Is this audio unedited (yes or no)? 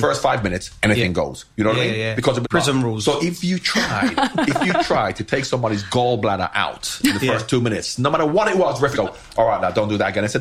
no